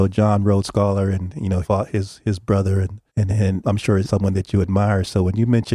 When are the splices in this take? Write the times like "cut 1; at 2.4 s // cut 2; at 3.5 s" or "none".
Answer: cut 1; at 1.6 s // cut 2; at 3.1 s // cut 3; at 3.6 s // cut 4; at 4.0 s

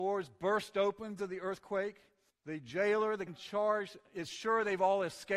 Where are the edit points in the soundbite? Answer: cut 1; at 1.2 s // cut 2; at 2.3 s // cut 3; at 3.3 s

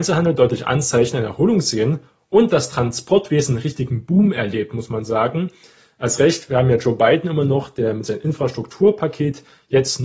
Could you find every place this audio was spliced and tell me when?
none

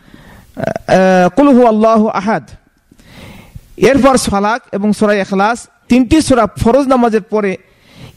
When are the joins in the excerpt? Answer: cut 1; at 4.3 s // cut 2; at 5.9 s // cut 3; at 6.6 s

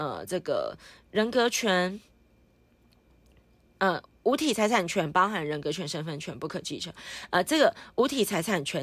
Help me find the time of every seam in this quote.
none

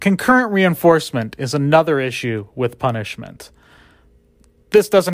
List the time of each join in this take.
none

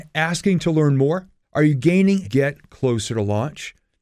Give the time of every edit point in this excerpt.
cut 1; at 1.4 s // cut 2; at 2.2 s

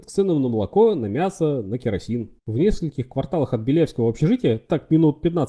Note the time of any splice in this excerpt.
cut 1; at 2.4 s

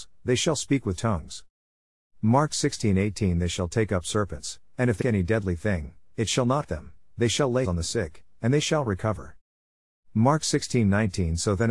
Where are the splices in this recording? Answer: cut 1; at 1.0 s // cut 2; at 5.0 s // cut 3; at 6.6 s // cut 4; at 7.6 s

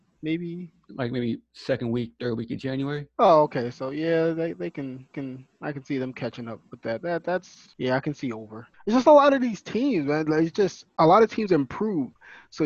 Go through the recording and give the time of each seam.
cut 1; at 1.5 s // cut 2; at 5.1 s // cut 3; at 7.7 s // cut 4; at 8.7 s

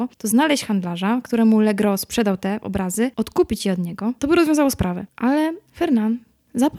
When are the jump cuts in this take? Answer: none

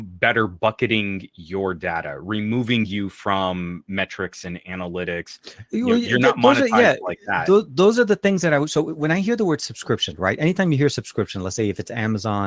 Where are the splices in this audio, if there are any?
none

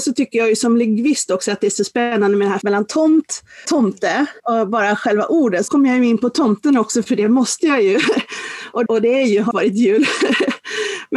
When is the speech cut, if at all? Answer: cut 1; at 2.6 s // cut 2; at 3.6 s // cut 3; at 4.4 s // cut 4; at 5.7 s // cut 5; at 8.9 s // cut 6; at 9.5 s

